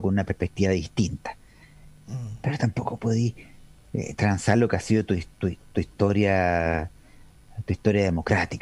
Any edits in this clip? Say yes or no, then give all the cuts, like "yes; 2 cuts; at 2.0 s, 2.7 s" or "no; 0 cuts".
no; 0 cuts